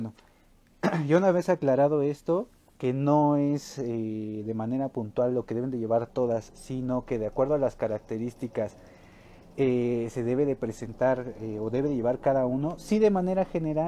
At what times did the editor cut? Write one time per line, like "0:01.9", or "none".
none

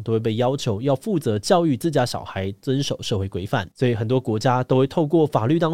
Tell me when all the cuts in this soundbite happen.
0:03.7

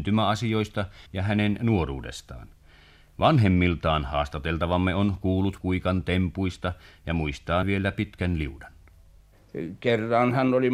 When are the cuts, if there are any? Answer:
0:01.1
0:05.6
0:07.6

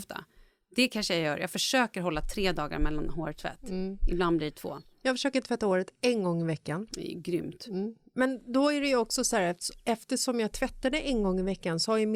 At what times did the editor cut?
none

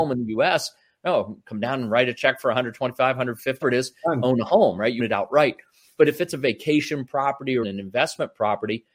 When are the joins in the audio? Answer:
0:03.6
0:05.0
0:07.6

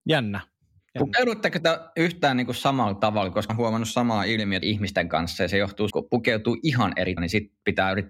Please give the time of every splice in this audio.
0:03.5
0:04.6
0:05.9
0:07.2

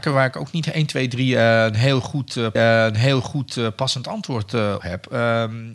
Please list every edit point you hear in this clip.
0:02.6
0:04.8

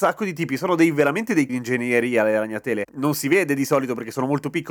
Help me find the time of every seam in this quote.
0:01.5
0:02.9

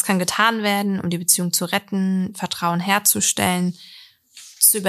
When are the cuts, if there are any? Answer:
none

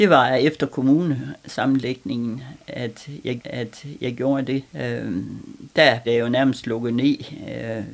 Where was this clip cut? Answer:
0:03.4
0:04.7
0:06.0

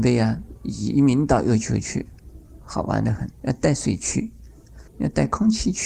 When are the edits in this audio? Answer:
0:02.6
0:03.3
0:04.9

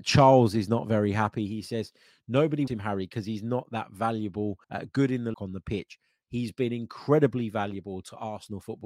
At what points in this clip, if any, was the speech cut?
0:02.7
0:04.6
0:05.3

